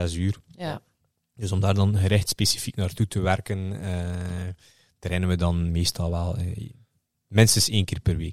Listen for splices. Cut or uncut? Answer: uncut